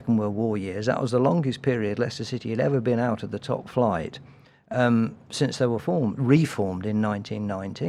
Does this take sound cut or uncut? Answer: cut